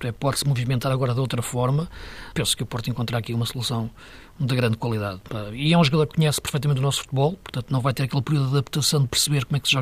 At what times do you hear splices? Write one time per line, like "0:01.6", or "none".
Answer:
0:02.3